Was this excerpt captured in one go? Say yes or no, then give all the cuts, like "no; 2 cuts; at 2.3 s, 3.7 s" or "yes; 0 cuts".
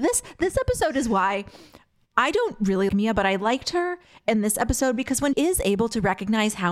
no; 2 cuts; at 2.9 s, 5.3 s